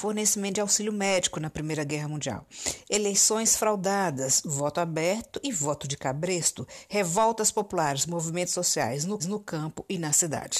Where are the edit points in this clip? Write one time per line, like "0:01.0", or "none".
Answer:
0:09.2